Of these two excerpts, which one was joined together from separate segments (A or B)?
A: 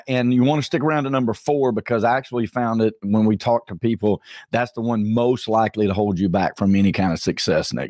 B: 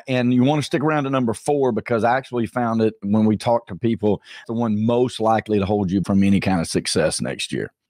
B